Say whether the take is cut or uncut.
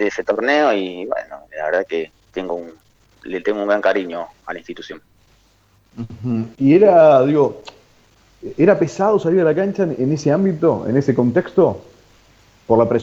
uncut